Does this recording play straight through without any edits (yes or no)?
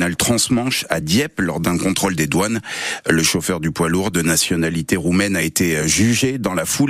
yes